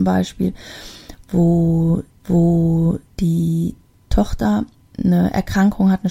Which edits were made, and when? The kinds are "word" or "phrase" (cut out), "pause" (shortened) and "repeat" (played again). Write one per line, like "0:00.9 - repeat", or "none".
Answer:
0:02.2 - repeat